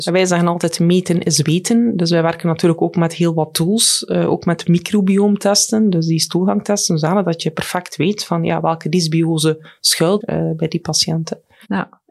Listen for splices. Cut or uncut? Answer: cut